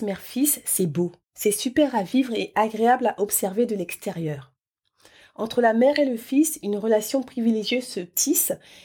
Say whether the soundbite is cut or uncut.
cut